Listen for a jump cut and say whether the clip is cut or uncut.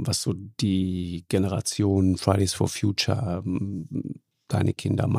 uncut